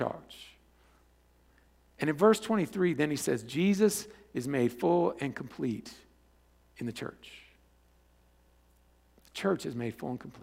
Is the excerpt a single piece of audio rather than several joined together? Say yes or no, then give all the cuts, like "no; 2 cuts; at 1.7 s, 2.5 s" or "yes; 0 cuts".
yes; 0 cuts